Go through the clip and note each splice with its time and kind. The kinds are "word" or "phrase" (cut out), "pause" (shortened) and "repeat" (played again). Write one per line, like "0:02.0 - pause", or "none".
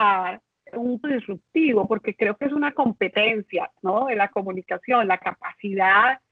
0:01.0 - word